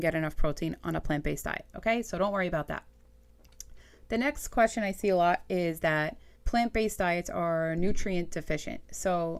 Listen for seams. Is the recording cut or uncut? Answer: cut